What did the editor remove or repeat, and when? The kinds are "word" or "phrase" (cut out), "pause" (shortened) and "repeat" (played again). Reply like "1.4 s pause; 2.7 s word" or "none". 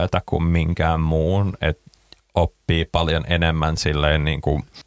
none